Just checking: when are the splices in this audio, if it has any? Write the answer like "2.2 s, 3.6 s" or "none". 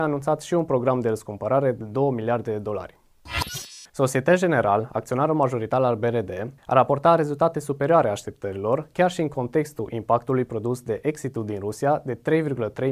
3.9 s, 6.6 s